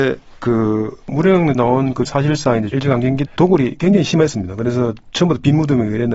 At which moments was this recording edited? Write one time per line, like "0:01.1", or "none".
0:01.6
0:02.1
0:03.3